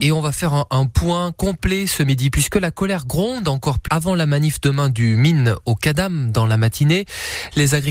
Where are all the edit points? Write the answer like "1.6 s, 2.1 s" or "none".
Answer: 3.9 s